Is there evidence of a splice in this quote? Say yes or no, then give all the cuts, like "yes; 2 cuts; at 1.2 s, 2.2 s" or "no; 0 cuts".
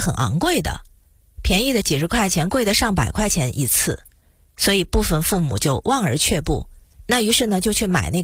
no; 0 cuts